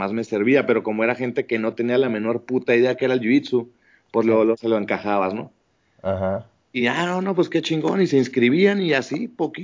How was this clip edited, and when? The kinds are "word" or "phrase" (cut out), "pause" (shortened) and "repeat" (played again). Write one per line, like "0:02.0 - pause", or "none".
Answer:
none